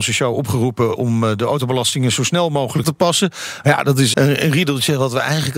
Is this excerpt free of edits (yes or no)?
no